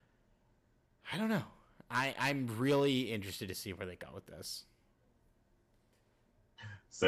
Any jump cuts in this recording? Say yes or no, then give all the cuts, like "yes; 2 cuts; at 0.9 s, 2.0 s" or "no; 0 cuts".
no; 0 cuts